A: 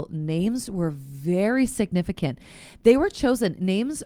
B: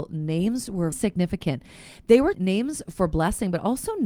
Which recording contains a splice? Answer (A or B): B